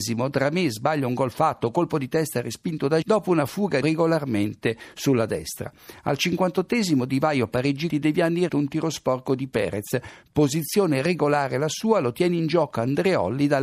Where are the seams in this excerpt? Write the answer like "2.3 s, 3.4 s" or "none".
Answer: 3.0 s, 3.8 s, 7.9 s, 8.5 s